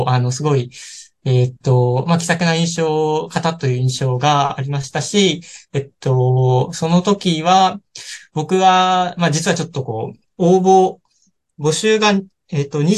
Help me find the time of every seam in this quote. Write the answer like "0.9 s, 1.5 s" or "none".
none